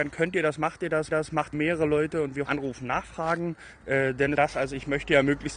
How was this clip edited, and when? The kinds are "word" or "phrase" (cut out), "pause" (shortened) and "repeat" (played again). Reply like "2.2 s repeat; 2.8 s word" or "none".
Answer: 1.1 s repeat; 1.5 s phrase; 2.4 s phrase; 4.3 s phrase